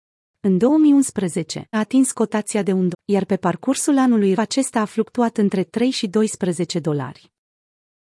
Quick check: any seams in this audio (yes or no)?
yes